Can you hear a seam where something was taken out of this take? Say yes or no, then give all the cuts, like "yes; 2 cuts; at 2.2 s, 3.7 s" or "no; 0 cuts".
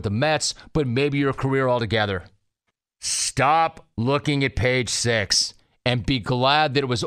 no; 0 cuts